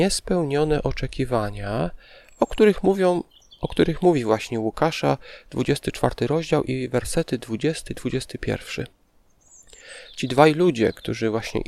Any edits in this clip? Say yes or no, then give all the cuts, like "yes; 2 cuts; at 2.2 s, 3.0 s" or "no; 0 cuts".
no; 0 cuts